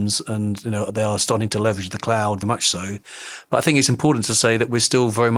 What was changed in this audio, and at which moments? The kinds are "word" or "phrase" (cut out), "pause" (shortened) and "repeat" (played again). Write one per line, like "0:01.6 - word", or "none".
0:02.4 - word